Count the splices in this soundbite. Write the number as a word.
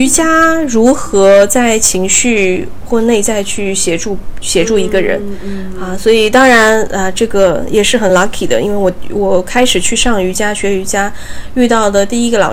zero